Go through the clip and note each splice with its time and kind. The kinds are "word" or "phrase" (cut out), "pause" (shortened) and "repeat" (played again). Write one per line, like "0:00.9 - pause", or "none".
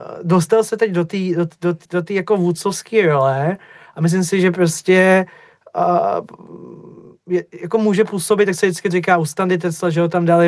0:01.8 - word

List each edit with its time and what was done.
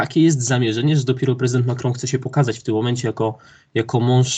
none

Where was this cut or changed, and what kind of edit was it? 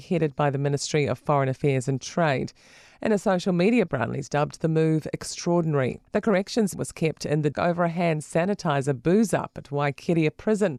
0:03.9 - word
0:06.1 - pause
0:06.7 - word
0:07.5 - word

